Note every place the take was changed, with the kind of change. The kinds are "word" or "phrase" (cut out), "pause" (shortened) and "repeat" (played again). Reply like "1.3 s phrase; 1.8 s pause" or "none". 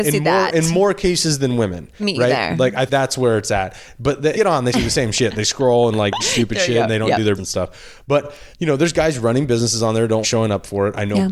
2.0 s word; 2.9 s word; 4.3 s phrase; 4.7 s word; 6.2 s word; 7.4 s word; 8.5 s pause; 10.2 s word